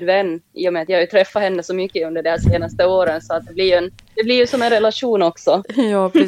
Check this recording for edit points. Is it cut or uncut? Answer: uncut